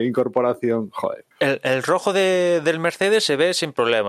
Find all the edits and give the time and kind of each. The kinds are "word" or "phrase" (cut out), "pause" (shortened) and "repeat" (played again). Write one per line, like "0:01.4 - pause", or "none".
0:01.3 - pause

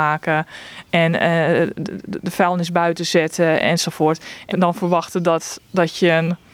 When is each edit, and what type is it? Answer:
0:04.5 - word

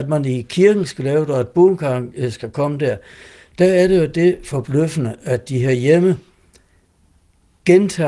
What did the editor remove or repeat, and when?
none

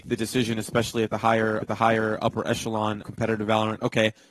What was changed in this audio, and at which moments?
0:01.6 - repeat
0:03.0 - word

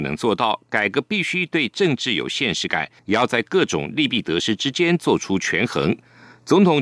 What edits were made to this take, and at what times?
0:03.0 - pause

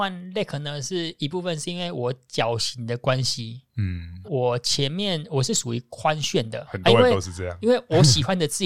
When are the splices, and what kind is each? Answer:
0:04.2 - word
0:06.7 - word

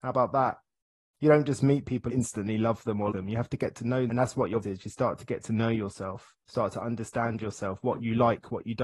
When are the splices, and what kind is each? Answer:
0:02.1 - phrase
0:03.1 - word
0:04.1 - phrase
0:04.6 - word
0:06.4 - pause

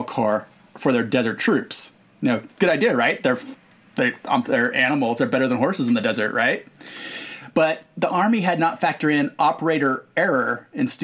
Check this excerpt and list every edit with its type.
0:04.4 - word

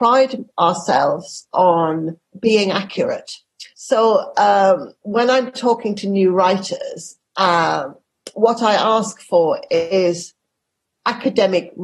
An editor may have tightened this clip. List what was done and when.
0:02.2 - pause
0:03.7 - pause
0:05.0 - pause

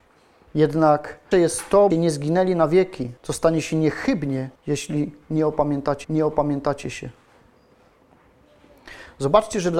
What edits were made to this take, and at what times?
0:01.3 - word
0:01.9 - word
0:03.2 - pause
0:04.6 - pause
0:06.0 - repeat

